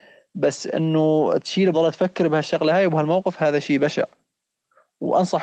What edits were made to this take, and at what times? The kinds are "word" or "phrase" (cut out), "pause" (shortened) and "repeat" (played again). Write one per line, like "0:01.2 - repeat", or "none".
0:01.7 - phrase

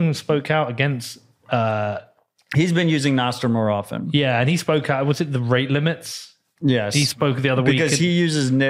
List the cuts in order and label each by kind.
none

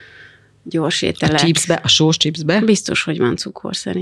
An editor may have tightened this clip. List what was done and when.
none

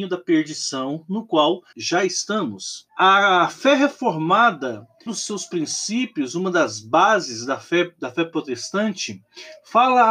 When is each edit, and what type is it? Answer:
0:01.7 - word
0:02.9 - pause
0:05.1 - word

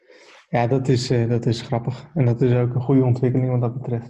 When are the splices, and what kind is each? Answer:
none

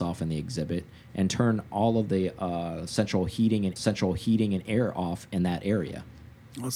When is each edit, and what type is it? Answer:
0:03.8 - repeat

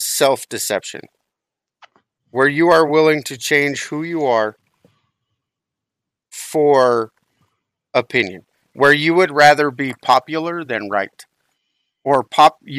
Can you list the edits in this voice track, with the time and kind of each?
none

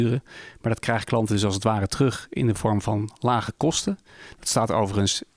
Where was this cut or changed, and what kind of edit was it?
none

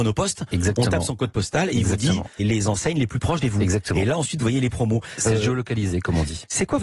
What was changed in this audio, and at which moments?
0:02.4 - word
0:03.4 - phrase

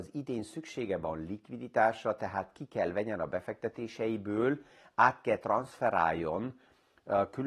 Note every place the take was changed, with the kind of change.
none

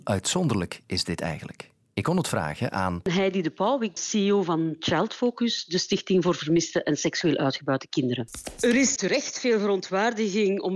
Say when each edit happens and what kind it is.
0:04.0 - word
0:09.0 - word

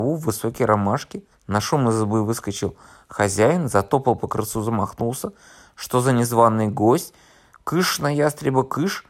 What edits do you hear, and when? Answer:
0:01.3 - pause

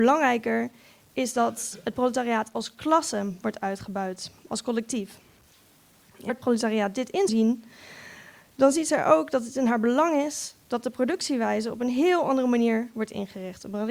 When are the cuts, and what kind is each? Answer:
0:06.3 - word
0:07.3 - word

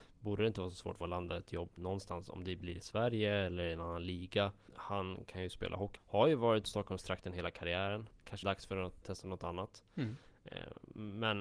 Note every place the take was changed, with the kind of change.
0:01.0 - word
0:06.0 - phrase
0:06.6 - word
0:08.4 - phrase
0:09.0 - word

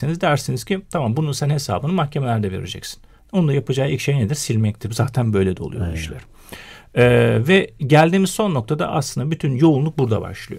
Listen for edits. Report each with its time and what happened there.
none

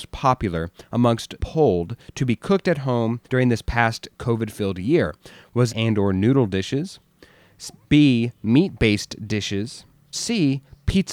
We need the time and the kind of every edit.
0:01.4 - word
0:03.2 - pause
0:05.7 - phrase
0:10.1 - word

